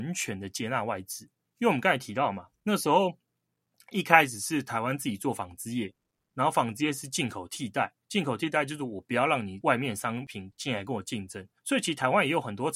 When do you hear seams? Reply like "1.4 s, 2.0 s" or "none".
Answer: 1.4 s, 8.0 s, 11.6 s

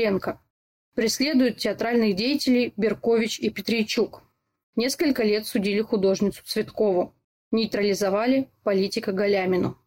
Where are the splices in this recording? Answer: none

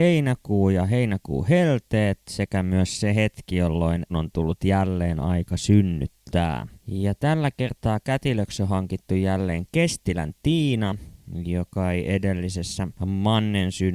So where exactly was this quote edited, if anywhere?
4.1 s, 6.8 s, 13.0 s

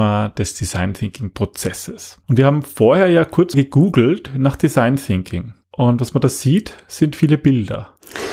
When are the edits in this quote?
2.2 s, 3.5 s, 5.6 s

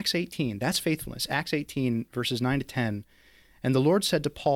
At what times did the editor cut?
none

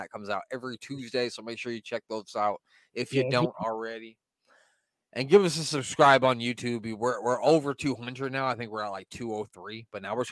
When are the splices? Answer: none

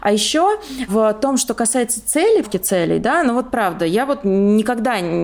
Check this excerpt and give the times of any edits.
2.4 s

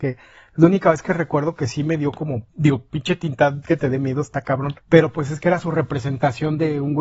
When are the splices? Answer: 2.5 s, 4.8 s

